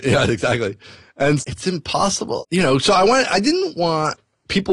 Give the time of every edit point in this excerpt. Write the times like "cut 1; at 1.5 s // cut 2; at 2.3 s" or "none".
cut 1; at 1.4 s // cut 2; at 2.4 s